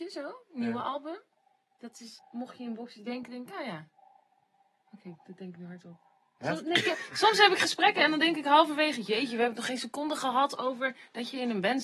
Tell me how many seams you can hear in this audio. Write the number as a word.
one